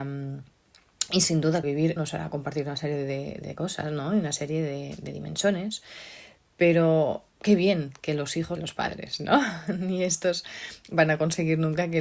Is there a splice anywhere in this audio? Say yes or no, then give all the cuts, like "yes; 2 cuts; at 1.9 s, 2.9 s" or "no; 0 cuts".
yes; 4 cuts; at 1.6 s, 2.0 s, 7.3 s, 8.6 s